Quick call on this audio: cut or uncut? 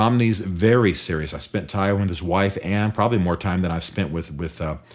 uncut